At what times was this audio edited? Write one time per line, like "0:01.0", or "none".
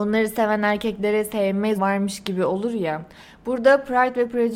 0:01.8